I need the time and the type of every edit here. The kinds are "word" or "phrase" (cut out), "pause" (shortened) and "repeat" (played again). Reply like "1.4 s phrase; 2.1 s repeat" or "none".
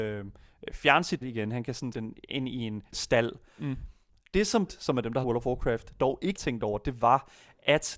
1.2 s word; 1.9 s word; 2.9 s word; 4.7 s word; 5.2 s word; 6.4 s word